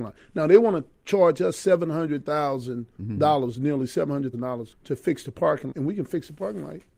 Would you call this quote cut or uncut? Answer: cut